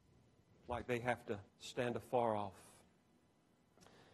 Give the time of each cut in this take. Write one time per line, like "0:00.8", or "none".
0:01.5

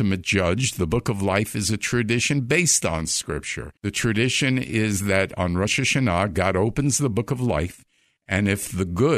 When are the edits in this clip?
0:03.8

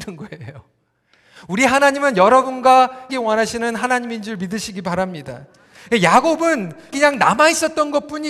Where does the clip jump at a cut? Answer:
0:03.1
0:06.9

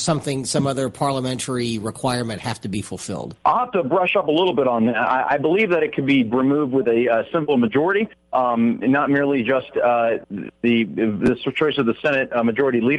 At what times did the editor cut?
0:03.4
0:06.3
0:08.8

